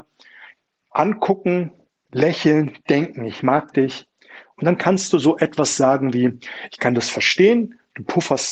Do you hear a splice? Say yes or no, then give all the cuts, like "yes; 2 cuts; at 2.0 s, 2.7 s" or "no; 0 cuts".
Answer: no; 0 cuts